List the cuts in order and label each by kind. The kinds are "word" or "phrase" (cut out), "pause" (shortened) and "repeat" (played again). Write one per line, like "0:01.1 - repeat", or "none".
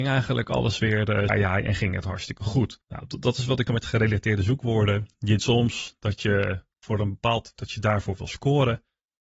0:01.3 - word
0:02.8 - pause
0:03.7 - phrase
0:05.4 - word
0:07.6 - word